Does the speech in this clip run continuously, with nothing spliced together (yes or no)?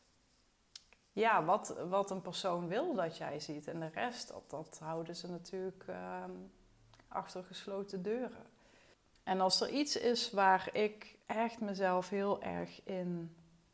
no